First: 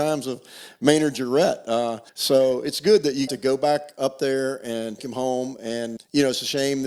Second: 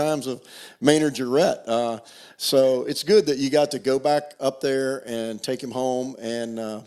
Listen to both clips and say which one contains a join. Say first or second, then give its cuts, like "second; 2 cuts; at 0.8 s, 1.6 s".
first; 4 cuts; at 2.1 s, 3.3 s, 5.0 s, 6.0 s